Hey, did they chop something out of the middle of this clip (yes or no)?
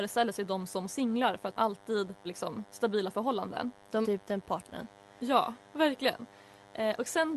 yes